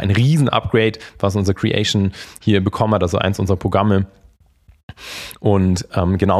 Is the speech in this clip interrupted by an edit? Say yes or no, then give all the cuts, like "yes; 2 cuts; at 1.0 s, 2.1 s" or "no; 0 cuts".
no; 0 cuts